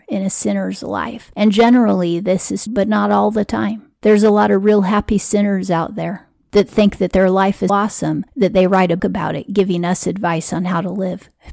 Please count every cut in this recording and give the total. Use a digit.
3